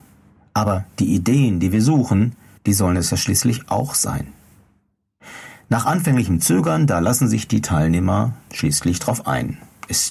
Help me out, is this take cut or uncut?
uncut